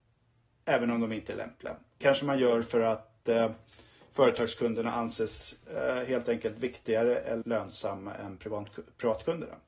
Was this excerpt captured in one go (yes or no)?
no